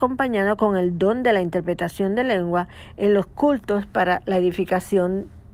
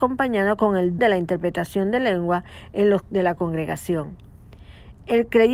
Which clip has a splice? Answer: second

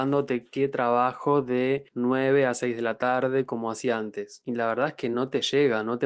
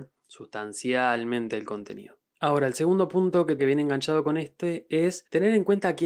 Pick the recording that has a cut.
second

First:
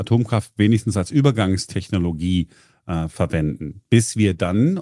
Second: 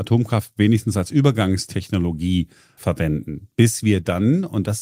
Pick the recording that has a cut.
second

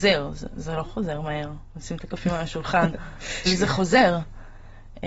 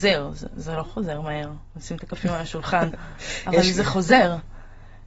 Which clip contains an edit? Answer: first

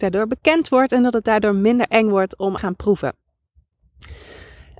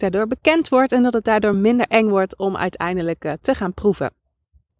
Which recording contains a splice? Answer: first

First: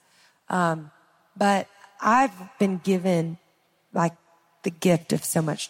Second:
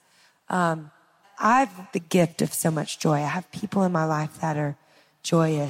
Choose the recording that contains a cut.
second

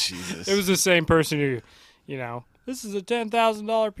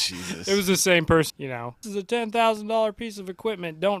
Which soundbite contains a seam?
second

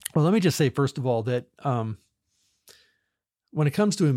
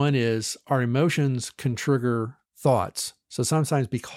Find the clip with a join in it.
second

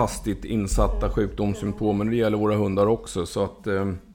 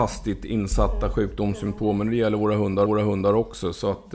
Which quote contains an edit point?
second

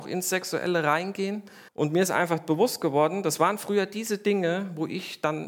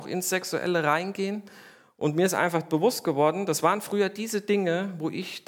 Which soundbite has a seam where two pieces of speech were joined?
first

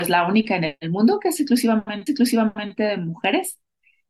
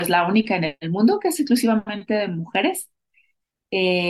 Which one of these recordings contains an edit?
first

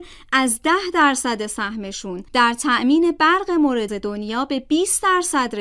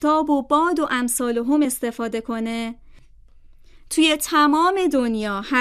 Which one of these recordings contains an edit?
first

